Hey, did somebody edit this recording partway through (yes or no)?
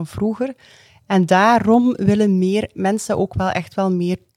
no